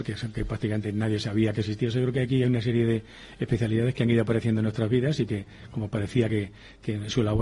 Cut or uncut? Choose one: uncut